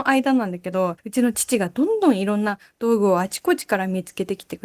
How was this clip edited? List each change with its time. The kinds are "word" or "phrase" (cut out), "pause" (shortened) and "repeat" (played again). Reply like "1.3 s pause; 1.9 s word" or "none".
1.0 s pause